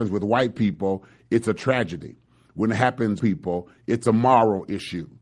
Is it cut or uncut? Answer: cut